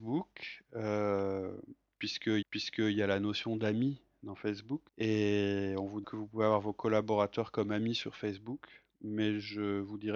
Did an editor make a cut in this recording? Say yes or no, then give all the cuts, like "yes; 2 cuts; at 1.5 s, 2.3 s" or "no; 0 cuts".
yes; 3 cuts; at 2.4 s, 4.9 s, 6.0 s